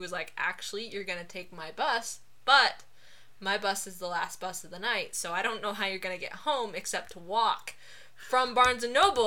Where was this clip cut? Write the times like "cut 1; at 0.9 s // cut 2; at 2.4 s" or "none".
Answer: none